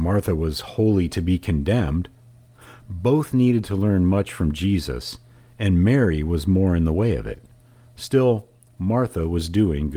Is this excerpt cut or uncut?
uncut